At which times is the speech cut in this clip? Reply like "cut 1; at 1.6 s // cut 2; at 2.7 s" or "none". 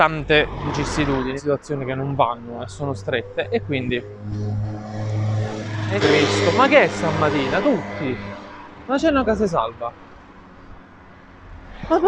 cut 1; at 1.4 s // cut 2; at 6.0 s // cut 3; at 9.3 s